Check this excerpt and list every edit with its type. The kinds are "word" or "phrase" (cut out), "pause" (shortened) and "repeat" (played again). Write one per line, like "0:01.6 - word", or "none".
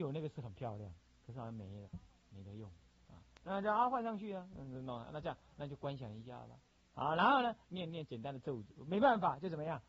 none